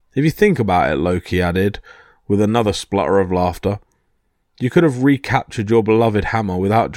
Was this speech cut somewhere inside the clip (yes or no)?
no